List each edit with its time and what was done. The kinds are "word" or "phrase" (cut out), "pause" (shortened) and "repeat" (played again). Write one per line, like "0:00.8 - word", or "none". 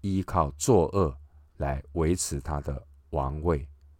none